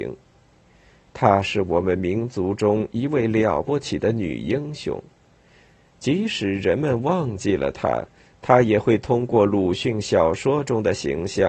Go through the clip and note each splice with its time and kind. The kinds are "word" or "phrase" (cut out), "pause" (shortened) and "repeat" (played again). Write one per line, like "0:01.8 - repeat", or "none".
none